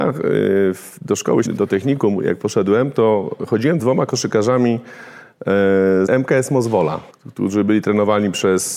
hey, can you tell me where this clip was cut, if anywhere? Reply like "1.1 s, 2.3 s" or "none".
1.0 s, 1.4 s, 3.8 s, 6.1 s, 7.1 s